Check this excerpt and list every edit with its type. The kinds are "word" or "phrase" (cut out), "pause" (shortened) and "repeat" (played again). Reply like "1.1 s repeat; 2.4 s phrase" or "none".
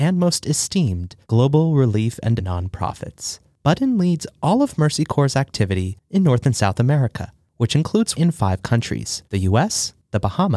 1.2 s pause; 2.4 s word; 8.1 s word; 9.2 s pause

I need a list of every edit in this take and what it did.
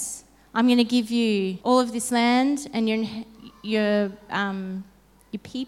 1.6 s pause

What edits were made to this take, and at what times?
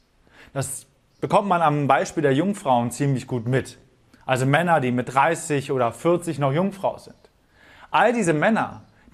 none

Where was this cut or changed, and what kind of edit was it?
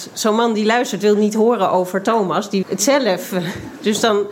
2.6 s word

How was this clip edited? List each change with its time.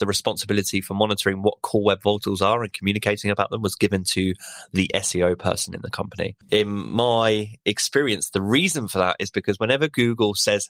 6.4 s pause

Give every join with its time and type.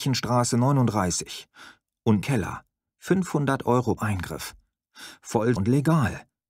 2.2 s word; 4.0 s word; 5.6 s word

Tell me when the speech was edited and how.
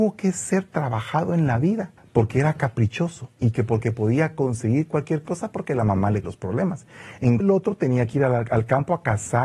2.0 s pause; 6.2 s word; 7.4 s word

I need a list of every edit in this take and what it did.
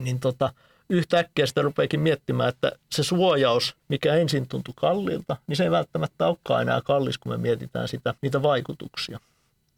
2.8 s pause; 3.8 s pause; 8.2 s pause

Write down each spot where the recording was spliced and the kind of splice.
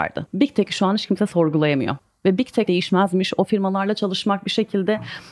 2.7 s phrase

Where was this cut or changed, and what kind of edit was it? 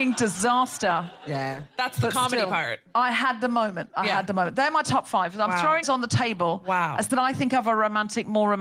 5.8 s word; 7.1 s word

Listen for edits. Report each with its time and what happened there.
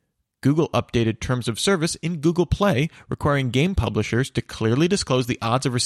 none

